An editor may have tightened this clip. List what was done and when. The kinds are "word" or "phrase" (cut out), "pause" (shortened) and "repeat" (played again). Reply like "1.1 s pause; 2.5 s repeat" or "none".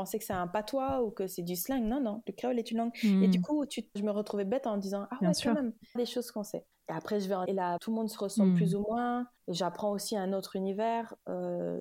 2.3 s word; 4.0 s word; 6.0 s phrase; 6.7 s pause; 7.5 s word; 7.8 s word; 9.4 s pause